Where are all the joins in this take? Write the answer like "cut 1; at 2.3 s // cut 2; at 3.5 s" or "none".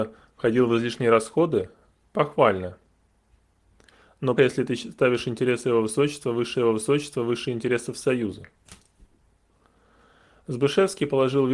cut 1; at 4.4 s // cut 2; at 6.5 s